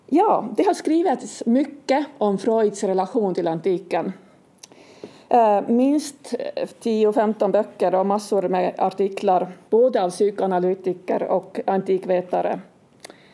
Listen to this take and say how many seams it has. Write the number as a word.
one